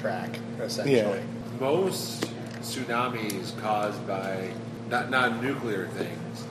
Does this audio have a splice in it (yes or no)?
no